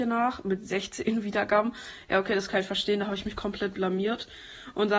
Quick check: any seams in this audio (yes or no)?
no